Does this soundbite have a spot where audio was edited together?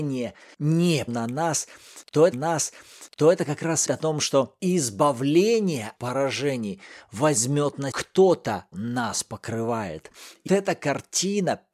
yes; 7 cuts; at 1.1 s, 2.3 s, 3.9 s, 6.0 s, 7.9 s, 8.7 s, 10.5 s

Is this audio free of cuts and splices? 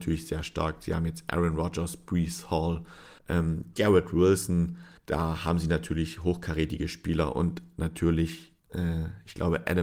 no; 3 cuts; at 3.2 s, 5.0 s, 8.6 s

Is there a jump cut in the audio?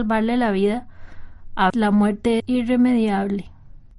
yes; 2 cuts; at 1.7 s, 2.4 s

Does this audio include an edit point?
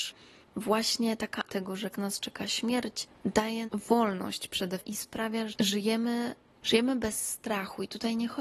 yes; 5 cuts; at 1.5 s, 1.9 s, 3.7 s, 4.8 s, 5.5 s

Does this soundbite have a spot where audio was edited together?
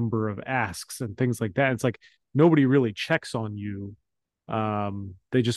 no; 0 cuts

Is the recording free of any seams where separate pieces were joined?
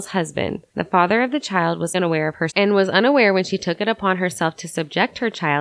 no; 2 cuts; at 1.9 s, 2.5 s

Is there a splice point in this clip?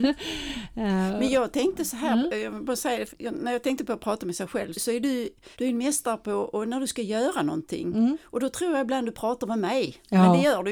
yes; 3 cuts; at 3.1 s, 4.7 s, 5.5 s

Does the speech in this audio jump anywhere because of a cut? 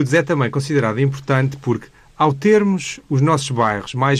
no; 0 cuts

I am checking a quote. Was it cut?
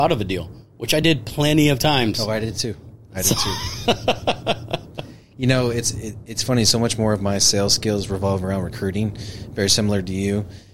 no; 0 cuts

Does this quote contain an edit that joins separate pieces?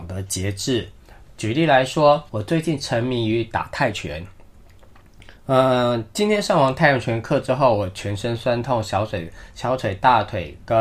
yes; 2 cuts; at 2.3 s, 5.4 s

